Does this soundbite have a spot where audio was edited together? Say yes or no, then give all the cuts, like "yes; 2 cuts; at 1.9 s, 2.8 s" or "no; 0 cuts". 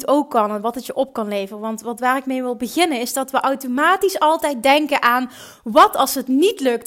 no; 0 cuts